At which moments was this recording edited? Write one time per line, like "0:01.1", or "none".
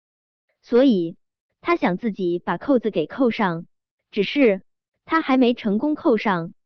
none